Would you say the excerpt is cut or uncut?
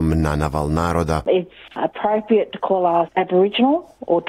cut